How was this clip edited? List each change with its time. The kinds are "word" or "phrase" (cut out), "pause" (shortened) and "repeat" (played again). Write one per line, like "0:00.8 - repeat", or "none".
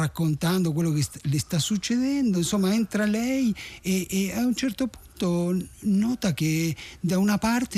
none